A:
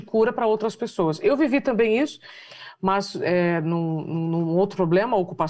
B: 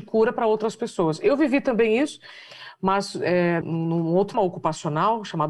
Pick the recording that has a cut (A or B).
B